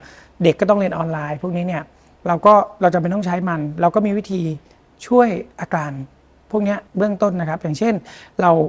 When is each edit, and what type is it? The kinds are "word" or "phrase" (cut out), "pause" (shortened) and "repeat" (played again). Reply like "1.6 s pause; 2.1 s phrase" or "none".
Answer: 5.5 s pause; 6.9 s pause